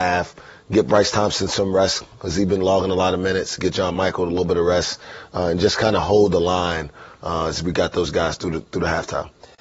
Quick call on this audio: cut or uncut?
uncut